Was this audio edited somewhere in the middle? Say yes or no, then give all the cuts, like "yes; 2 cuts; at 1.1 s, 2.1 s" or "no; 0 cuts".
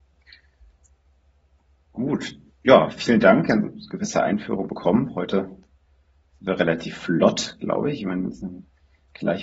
no; 0 cuts